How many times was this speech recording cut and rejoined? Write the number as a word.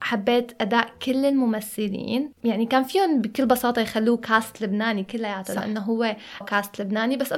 one